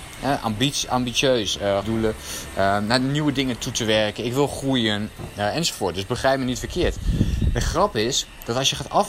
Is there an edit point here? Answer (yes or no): yes